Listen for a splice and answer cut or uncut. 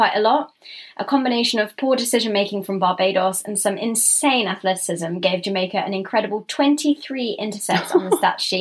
uncut